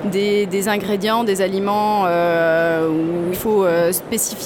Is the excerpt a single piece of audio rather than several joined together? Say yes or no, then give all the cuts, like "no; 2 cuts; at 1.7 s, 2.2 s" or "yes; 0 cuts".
no; 1 cut; at 3.3 s